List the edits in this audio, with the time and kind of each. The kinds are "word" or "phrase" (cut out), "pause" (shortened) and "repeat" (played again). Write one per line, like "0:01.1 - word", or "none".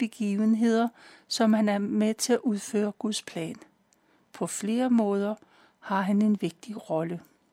none